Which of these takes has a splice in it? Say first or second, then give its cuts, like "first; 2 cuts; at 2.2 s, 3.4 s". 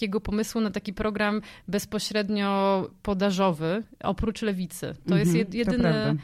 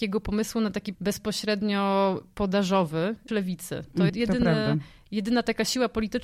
second; 3 cuts; at 0.9 s, 3.3 s, 4.1 s